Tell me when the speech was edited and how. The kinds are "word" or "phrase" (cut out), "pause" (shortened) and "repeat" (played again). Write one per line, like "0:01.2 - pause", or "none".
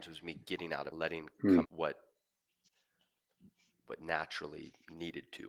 0:00.9 - phrase
0:01.6 - word